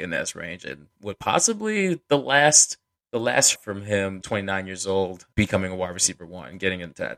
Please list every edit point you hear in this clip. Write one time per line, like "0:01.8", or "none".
0:02.8
0:03.5
0:04.2
0:05.3